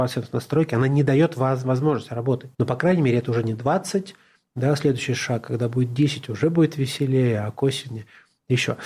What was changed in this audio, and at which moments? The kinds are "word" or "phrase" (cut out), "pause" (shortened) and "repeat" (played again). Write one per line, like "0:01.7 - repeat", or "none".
0:02.5 - pause

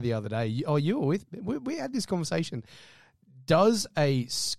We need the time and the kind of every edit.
none

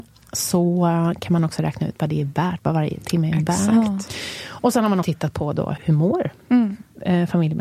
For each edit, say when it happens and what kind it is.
0:05.0 - word
0:05.8 - word

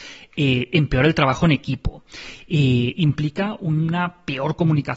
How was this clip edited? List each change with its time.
none

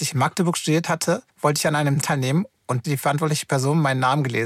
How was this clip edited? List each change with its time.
0:01.3 - pause
0:02.0 - word
0:02.8 - phrase

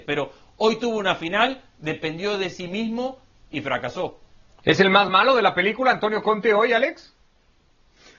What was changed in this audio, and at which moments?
none

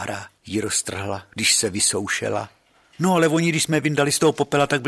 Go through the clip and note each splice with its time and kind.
none

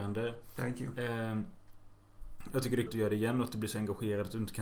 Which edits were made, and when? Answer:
0:02.9 - word

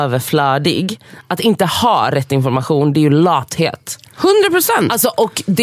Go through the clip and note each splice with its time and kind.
none

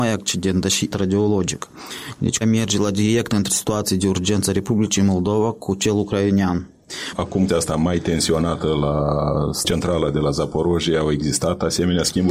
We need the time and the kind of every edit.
0:00.9 - word
0:02.4 - word
0:03.5 - phrase
0:07.5 - phrase

